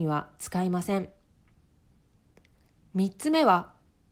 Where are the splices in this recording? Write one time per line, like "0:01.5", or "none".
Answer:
none

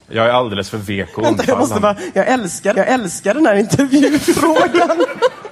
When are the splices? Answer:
0:02.7

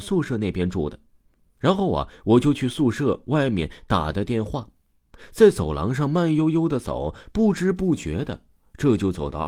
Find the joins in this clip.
none

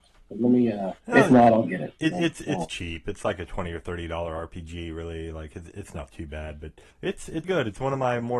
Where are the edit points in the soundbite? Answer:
0:01.0
0:05.7
0:06.9
0:07.4

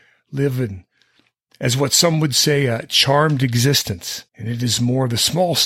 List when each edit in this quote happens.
0:04.3

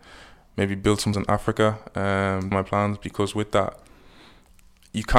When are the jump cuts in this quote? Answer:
0:01.1
0:02.5

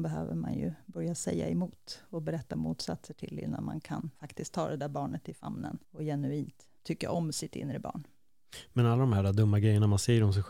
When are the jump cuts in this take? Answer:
0:04.1
0:05.8
0:06.8

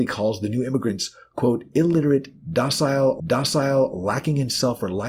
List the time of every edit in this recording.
0:03.2

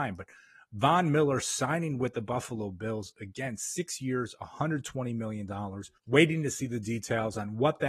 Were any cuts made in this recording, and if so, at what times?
0:06.0

